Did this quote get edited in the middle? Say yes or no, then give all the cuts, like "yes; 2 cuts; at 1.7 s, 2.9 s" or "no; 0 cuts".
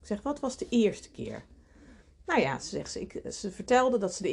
no; 0 cuts